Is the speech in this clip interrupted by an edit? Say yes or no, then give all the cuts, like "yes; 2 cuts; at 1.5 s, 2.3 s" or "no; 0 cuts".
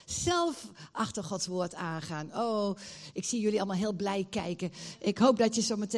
no; 0 cuts